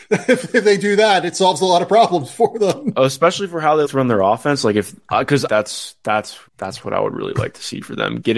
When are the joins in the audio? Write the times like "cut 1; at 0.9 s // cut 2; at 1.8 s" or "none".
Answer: cut 1; at 3.8 s // cut 2; at 5.5 s // cut 3; at 6.5 s